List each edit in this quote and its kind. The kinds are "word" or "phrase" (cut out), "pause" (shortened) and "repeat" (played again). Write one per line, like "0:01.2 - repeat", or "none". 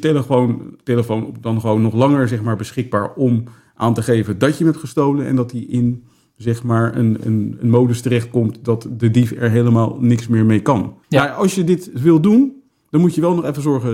0:11.0 - pause